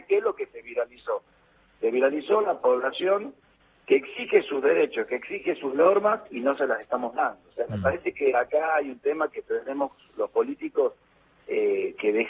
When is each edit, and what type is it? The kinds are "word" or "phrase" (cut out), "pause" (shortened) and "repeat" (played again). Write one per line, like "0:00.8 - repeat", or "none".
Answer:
none